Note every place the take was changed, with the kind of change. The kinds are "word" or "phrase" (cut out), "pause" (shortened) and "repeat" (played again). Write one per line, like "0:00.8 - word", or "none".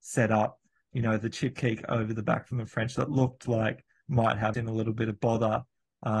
0:04.5 - word